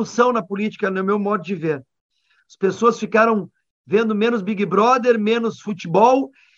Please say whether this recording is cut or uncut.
uncut